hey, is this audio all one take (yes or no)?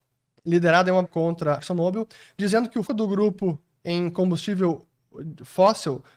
no